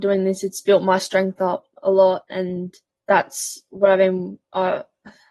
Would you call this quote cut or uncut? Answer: cut